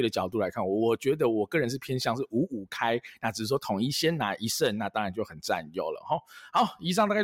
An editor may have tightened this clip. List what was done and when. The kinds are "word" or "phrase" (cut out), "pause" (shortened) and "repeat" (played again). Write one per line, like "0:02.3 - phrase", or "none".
none

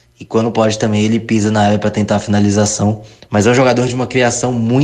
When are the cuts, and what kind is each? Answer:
none

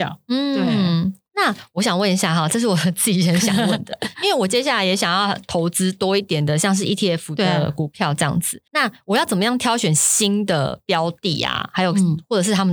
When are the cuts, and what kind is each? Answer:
0:01.3 - pause
0:08.7 - pause

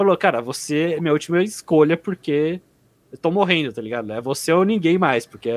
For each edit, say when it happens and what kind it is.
none

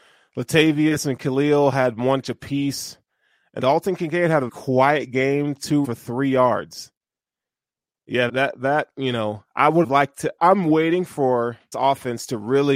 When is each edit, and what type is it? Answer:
0:02.2 - word
0:03.6 - word
0:04.5 - word
0:05.8 - word
0:08.3 - word
0:09.8 - word
0:10.4 - word
0:11.7 - word

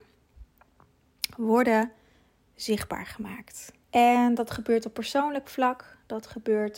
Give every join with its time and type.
0:03.8 - pause

